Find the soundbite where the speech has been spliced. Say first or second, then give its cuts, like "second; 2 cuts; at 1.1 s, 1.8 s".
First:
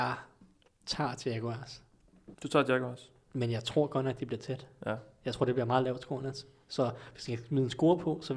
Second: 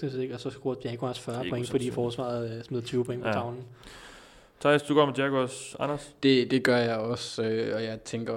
first; 1 cut; at 2.3 s